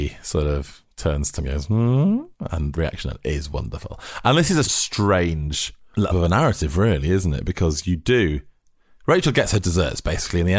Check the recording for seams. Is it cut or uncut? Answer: cut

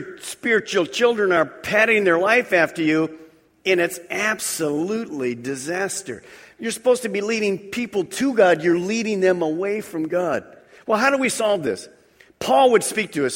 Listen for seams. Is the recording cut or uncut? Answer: uncut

